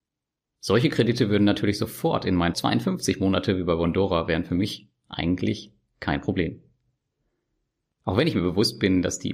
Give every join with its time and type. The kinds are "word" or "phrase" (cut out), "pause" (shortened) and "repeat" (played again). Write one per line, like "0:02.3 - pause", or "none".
0:02.5 - phrase